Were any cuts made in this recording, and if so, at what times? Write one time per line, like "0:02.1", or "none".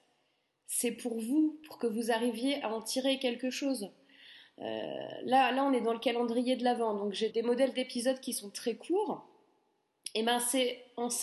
0:07.3